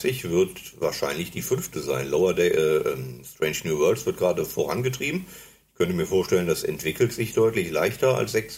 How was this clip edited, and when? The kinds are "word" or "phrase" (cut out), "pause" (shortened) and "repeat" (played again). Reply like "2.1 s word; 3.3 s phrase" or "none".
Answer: none